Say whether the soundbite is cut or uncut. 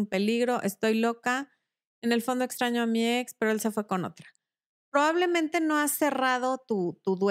uncut